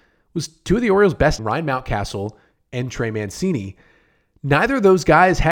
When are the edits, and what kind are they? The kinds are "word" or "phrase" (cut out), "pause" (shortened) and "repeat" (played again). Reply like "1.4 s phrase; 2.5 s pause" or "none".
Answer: 1.4 s phrase